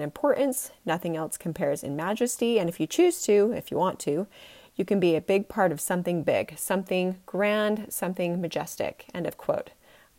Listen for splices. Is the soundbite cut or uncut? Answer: uncut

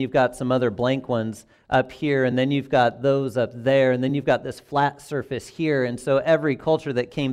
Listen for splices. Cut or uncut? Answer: uncut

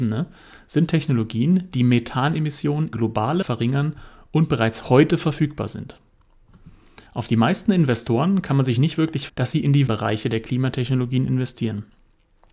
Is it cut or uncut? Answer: cut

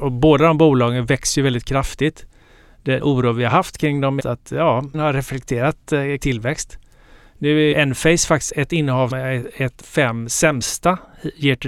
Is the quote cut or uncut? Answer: cut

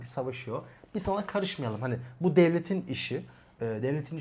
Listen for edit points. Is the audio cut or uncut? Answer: uncut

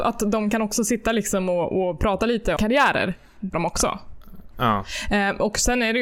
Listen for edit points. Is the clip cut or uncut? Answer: cut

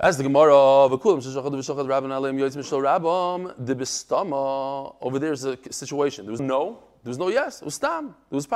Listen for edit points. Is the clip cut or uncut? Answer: cut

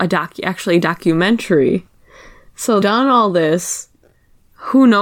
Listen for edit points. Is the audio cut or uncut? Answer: cut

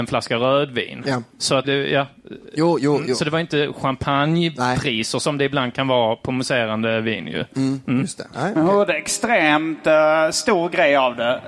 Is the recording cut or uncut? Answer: cut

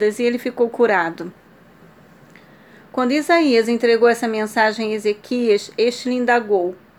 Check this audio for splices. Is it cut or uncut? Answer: uncut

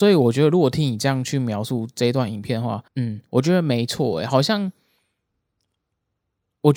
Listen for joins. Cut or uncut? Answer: cut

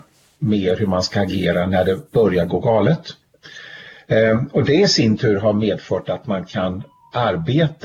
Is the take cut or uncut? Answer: uncut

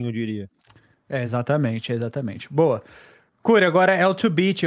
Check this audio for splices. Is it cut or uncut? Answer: uncut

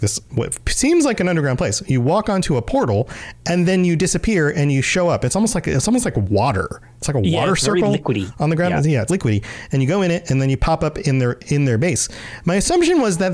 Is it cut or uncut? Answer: cut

